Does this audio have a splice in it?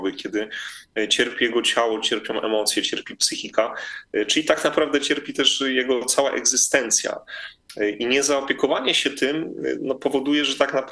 no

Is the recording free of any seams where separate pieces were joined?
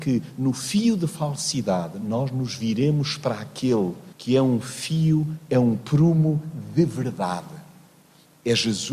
no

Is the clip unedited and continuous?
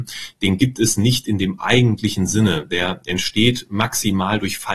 yes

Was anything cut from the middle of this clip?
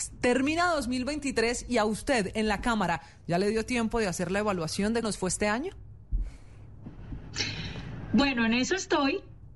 yes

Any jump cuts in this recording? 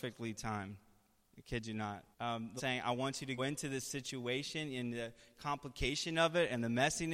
yes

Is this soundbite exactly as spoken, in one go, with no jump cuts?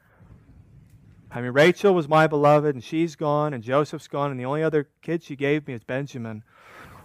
yes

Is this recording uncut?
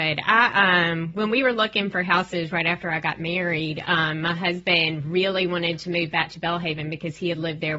yes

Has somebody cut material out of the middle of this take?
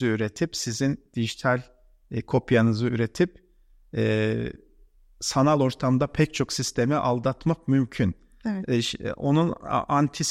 no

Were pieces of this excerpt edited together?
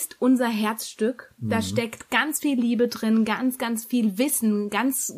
no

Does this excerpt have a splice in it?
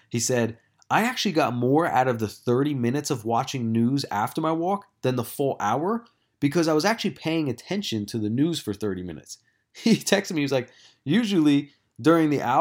no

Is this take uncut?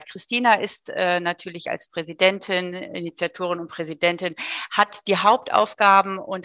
yes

